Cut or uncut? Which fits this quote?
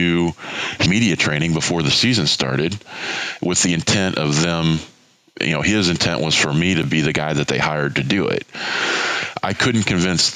uncut